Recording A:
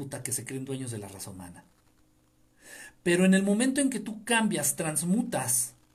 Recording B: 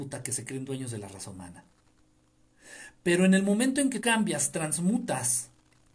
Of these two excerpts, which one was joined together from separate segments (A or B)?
B